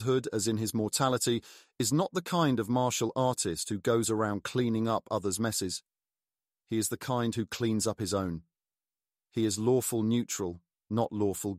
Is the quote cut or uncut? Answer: uncut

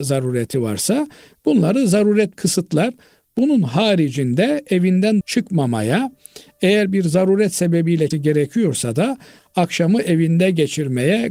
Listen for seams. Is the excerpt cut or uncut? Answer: cut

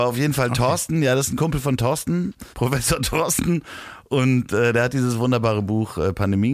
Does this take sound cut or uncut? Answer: cut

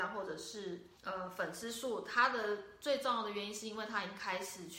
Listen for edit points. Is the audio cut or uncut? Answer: cut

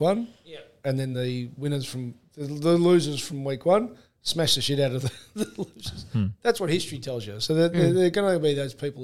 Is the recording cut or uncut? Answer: uncut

